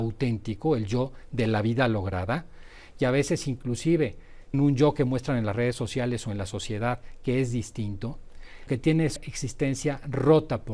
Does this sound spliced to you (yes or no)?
yes